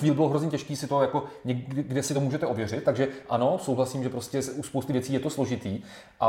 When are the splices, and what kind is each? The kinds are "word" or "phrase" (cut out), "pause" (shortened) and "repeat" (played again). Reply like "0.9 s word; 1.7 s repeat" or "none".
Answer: none